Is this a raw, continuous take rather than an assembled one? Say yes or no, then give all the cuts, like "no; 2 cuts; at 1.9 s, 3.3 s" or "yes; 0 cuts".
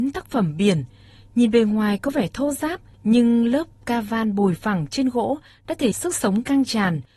no; 1 cut; at 5.9 s